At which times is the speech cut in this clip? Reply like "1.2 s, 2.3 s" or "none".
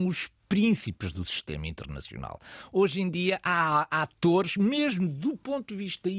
none